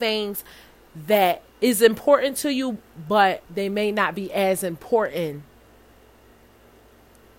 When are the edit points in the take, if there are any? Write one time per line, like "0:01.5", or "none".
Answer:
0:01.5
0:03.5